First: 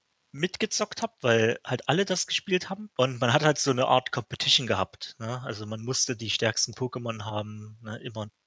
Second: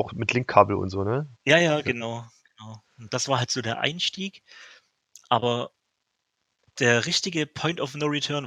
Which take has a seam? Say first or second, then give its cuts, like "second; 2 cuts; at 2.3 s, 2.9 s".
first; 1 cut; at 2.9 s